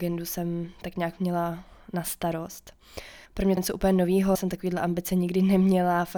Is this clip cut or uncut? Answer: cut